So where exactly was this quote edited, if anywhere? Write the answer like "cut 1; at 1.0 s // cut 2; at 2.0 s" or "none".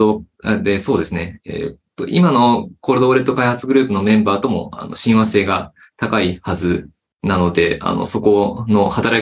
none